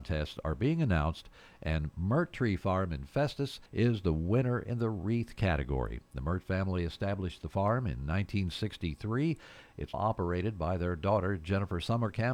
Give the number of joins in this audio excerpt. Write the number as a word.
two